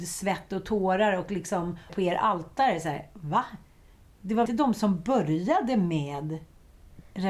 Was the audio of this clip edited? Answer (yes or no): yes